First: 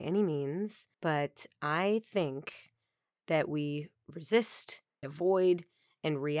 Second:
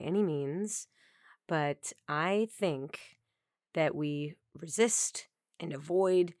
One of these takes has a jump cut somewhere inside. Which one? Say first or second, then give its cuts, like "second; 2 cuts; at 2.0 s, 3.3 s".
first; 2 cuts; at 0.9 s, 5.0 s